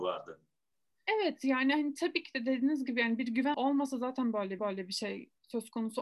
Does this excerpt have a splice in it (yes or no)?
yes